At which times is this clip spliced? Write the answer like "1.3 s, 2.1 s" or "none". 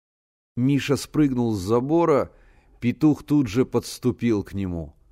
none